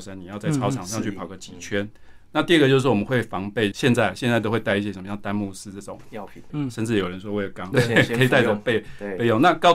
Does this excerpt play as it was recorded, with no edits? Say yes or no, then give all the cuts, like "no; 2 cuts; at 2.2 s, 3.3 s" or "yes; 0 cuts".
no; 3 cuts; at 3.7 s, 6.5 s, 7.7 s